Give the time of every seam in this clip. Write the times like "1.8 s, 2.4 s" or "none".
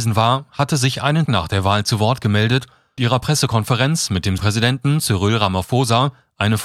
1.3 s, 3.0 s, 4.4 s